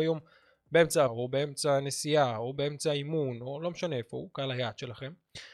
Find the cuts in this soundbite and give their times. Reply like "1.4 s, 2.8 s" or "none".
1.1 s